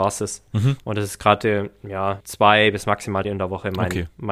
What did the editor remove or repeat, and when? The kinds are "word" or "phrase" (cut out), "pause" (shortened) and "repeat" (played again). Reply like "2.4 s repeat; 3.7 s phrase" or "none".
2.2 s word; 3.2 s word